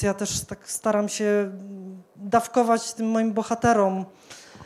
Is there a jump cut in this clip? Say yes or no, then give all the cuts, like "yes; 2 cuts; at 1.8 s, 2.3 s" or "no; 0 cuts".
no; 0 cuts